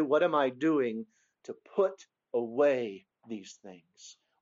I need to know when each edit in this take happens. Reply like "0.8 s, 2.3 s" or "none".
none

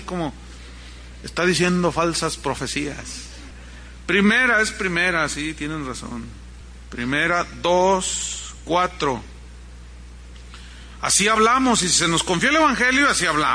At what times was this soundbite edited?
none

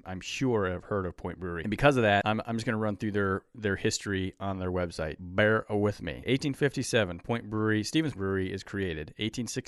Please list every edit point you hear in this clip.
8.1 s

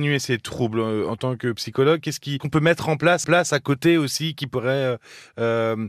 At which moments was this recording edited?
2.4 s, 3.2 s

